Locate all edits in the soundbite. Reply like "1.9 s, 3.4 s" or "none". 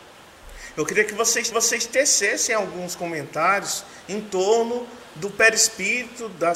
1.5 s

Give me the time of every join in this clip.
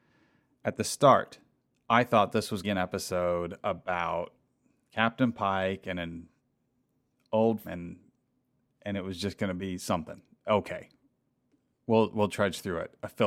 1.6 s, 2.6 s, 7.6 s

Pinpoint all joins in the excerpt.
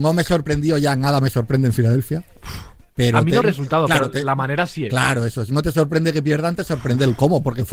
3.4 s

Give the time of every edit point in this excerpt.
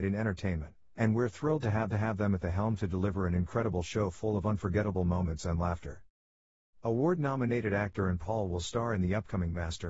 1.9 s, 8.2 s

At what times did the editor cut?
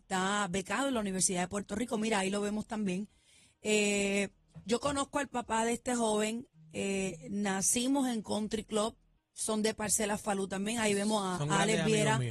none

